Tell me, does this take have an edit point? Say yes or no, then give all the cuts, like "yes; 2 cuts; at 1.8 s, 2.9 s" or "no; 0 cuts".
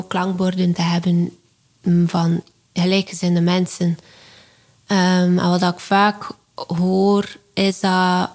no; 0 cuts